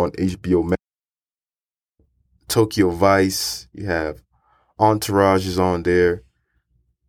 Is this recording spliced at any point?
no; 0 cuts

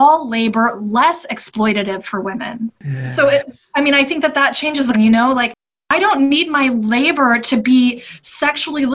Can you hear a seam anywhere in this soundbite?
yes; 2 cuts; at 2.8 s, 4.9 s

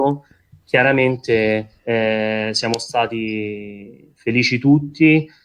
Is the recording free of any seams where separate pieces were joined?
no; 1 cut; at 1.8 s

